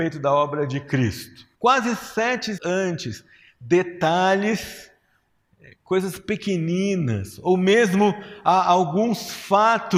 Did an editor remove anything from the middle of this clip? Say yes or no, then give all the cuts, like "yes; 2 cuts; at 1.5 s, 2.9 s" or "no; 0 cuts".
yes; 2 cuts; at 1.5 s, 2.6 s